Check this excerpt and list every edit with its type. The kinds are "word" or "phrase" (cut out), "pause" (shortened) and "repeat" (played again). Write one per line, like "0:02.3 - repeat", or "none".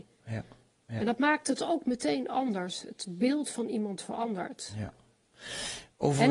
none